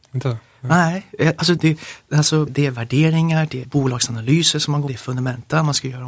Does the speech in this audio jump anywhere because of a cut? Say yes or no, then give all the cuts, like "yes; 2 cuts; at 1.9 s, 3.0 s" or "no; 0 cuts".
yes; 4 cuts; at 1.6 s, 2.5 s, 3.6 s, 4.9 s